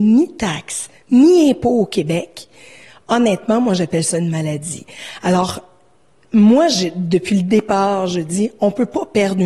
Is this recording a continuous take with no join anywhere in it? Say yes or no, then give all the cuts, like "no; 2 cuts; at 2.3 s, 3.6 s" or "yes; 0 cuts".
yes; 0 cuts